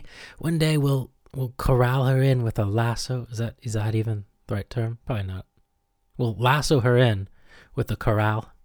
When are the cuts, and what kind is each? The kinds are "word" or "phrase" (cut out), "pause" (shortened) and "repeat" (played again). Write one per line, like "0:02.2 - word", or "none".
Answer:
none